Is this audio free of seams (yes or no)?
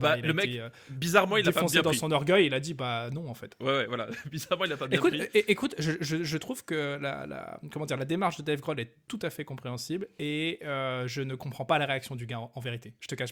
yes